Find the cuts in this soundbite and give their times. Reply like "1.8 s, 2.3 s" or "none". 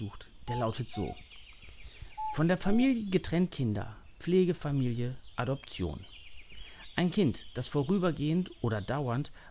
3.5 s